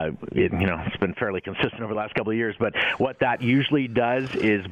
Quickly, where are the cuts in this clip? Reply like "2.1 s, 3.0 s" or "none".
none